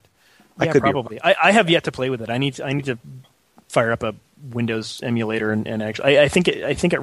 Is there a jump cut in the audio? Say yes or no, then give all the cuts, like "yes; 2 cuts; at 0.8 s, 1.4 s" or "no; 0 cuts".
no; 0 cuts